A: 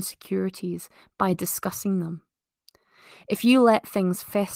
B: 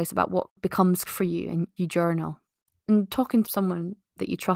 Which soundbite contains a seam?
B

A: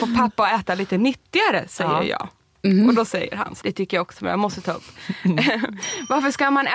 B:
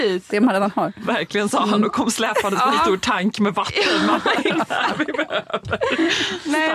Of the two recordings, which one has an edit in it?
A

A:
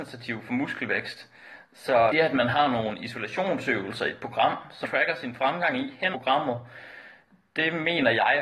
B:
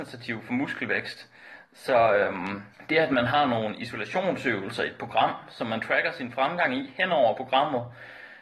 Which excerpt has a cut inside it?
A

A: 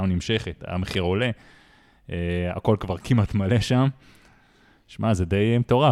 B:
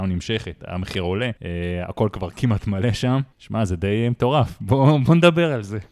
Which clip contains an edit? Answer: B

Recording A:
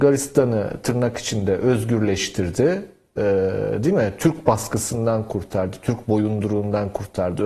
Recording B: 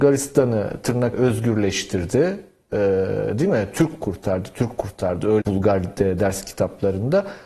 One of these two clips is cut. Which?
B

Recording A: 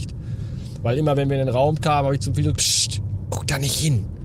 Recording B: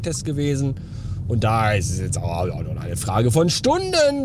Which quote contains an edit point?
A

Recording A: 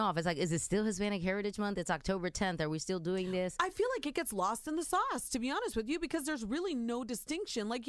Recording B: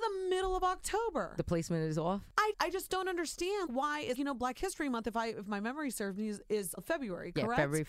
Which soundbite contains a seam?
B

